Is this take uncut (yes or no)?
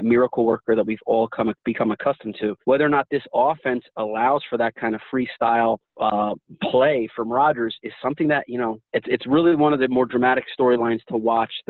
no